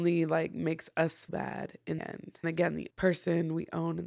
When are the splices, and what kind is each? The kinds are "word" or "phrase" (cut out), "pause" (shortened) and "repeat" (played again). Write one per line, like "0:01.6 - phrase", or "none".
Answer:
0:01.3 - word
0:02.0 - word
0:02.4 - word
0:02.9 - word